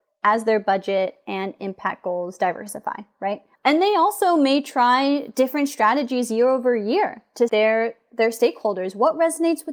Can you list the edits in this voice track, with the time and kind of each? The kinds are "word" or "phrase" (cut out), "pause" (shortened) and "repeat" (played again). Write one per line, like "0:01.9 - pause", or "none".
0:03.5 - pause
0:07.5 - phrase